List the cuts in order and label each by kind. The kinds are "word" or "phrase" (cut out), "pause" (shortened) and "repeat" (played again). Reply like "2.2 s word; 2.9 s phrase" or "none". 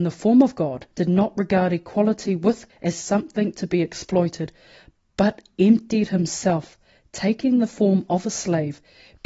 0.9 s pause; 2.7 s word